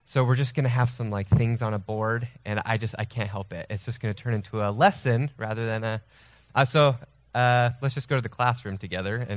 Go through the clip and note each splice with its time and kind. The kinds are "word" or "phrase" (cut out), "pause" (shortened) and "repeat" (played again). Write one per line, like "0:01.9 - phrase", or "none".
none